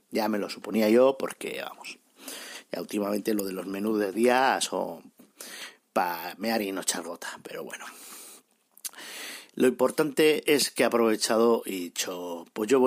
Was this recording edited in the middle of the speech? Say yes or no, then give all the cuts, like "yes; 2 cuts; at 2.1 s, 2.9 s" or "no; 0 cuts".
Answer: no; 0 cuts